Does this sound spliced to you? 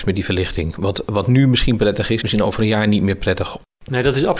yes; 1 cut; at 2.2 s

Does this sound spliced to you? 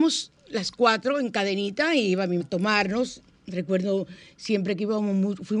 yes; 1 cut; at 2.4 s

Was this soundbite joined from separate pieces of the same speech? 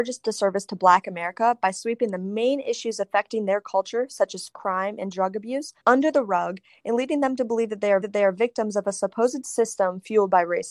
yes; 3 cuts; at 4.5 s, 5.8 s, 8.0 s

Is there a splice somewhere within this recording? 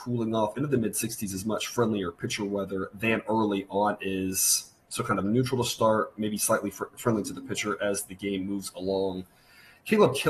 no; 0 cuts

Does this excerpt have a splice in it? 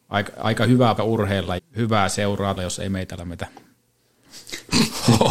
yes; 4 cuts; at 1.0 s, 1.6 s, 2.6 s, 3.2 s

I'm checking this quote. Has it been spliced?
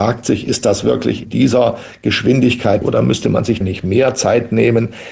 yes; 3 cuts; at 1.2 s, 2.8 s, 3.6 s

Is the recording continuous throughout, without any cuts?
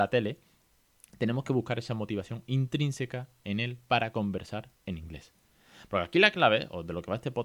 yes; 0 cuts

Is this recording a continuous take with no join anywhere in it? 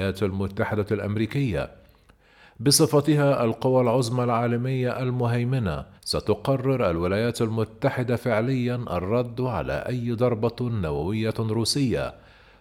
no; 1 cut; at 6.0 s

